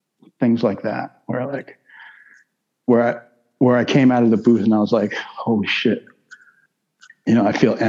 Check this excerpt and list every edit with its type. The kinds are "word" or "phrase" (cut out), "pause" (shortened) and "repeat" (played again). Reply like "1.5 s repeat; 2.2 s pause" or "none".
none